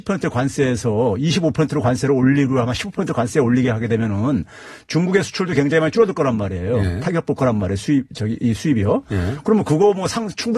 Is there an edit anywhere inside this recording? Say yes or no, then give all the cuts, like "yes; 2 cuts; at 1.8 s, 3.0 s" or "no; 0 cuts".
no; 0 cuts